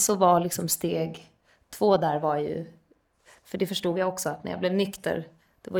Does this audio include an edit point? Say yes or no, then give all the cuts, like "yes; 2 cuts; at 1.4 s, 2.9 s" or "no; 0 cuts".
no; 0 cuts